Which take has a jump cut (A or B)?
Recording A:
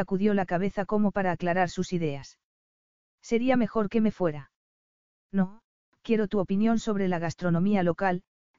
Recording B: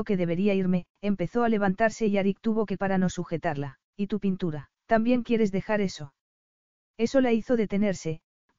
B